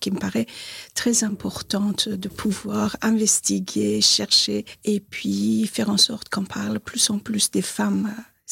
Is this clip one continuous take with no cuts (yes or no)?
yes